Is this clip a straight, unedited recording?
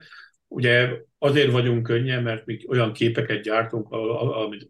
yes; 0 cuts

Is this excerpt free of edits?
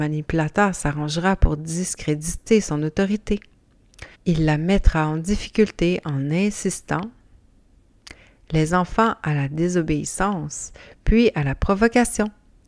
no; 1 cut; at 4.1 s

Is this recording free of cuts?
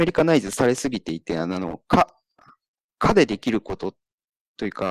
yes; 0 cuts

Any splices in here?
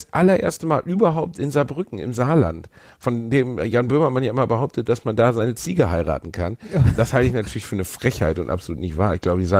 no; 0 cuts

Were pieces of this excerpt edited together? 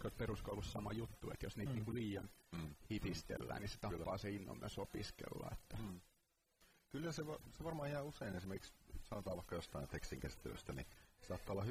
no; 0 cuts

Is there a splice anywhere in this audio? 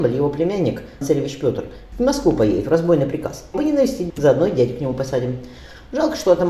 yes; 4 cuts; at 1.0 s, 1.9 s, 3.5 s, 4.1 s

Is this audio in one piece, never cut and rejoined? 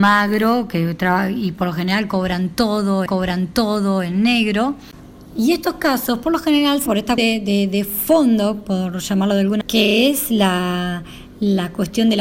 no; 4 cuts; at 3.1 s, 6.9 s, 7.2 s, 9.6 s

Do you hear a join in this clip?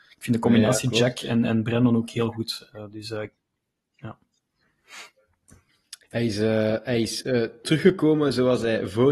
yes; 1 cut; at 6.0 s

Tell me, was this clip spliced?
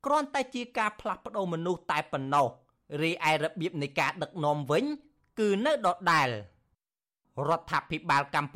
no; 0 cuts

